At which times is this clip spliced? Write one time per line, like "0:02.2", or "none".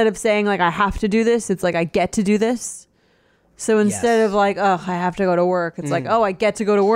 none